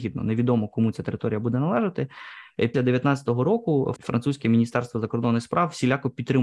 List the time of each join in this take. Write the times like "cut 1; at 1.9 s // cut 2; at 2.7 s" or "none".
cut 1; at 2.7 s // cut 2; at 4.0 s